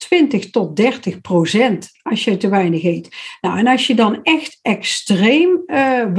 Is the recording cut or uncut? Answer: uncut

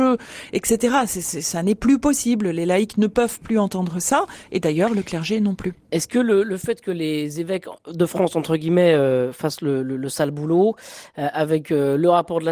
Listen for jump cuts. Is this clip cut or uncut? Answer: uncut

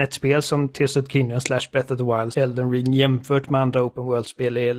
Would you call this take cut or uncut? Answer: cut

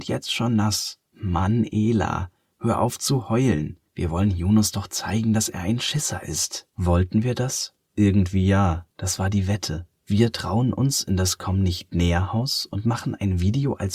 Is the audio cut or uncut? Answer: cut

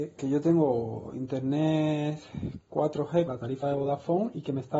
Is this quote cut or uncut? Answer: cut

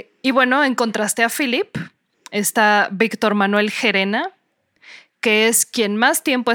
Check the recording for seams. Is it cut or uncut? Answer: uncut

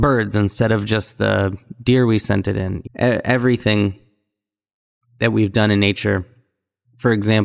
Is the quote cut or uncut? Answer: cut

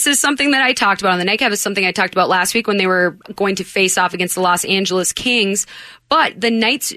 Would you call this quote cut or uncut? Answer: uncut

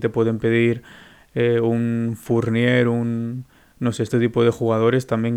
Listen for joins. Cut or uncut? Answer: uncut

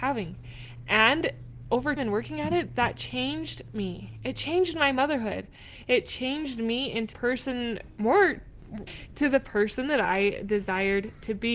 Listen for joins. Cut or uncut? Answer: cut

